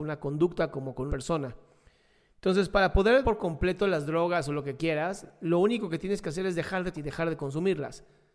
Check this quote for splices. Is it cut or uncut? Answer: cut